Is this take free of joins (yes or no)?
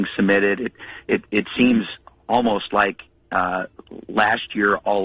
yes